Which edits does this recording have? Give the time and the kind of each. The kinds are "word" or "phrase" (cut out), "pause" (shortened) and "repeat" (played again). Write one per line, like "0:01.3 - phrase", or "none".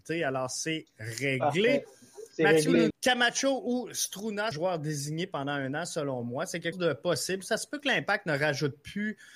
0:02.9 - word
0:04.5 - word
0:06.7 - word